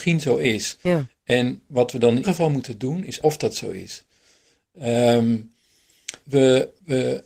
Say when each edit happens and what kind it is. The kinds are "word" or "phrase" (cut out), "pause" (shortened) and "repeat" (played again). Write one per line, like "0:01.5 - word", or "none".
0:02.2 - word
0:03.2 - word
0:06.2 - word